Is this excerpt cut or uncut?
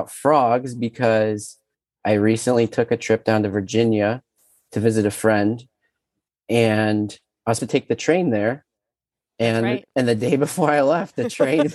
cut